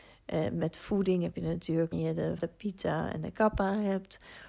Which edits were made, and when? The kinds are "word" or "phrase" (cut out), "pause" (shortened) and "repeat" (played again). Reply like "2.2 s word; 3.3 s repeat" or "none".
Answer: 1.9 s phrase; 2.4 s word

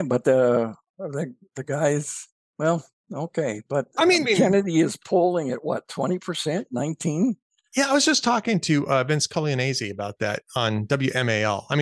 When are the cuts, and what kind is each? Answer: 2.4 s pause; 4.2 s phrase

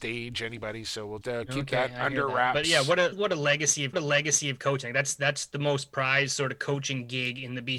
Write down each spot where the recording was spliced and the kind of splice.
1.2 s word; 3.1 s word; 3.9 s repeat

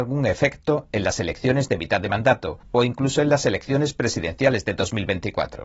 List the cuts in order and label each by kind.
2.6 s pause

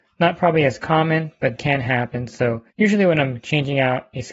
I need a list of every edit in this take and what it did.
1.6 s word; 2.7 s pause

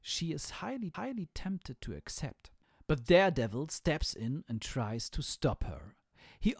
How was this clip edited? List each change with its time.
0.9 s repeat

